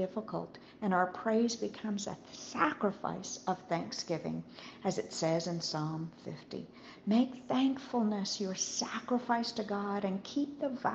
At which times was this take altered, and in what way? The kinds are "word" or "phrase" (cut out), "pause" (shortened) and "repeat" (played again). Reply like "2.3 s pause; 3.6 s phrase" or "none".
none